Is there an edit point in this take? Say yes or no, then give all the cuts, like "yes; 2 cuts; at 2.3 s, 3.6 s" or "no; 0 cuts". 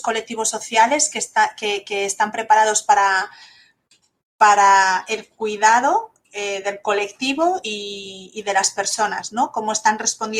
no; 0 cuts